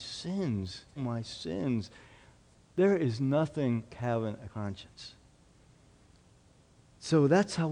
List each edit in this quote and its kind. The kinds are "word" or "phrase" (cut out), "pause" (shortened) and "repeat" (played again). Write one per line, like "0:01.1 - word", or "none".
0:01.0 - phrase
0:02.5 - pause
0:03.9 - word
0:04.5 - word